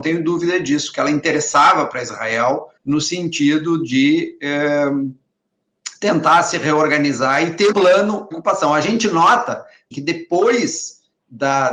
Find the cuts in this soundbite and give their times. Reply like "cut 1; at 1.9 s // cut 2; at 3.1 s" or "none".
cut 1; at 2.8 s // cut 2; at 7.7 s // cut 3; at 8.3 s // cut 4; at 9.9 s